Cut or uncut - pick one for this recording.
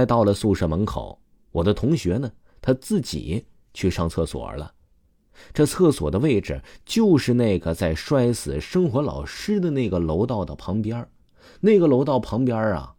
uncut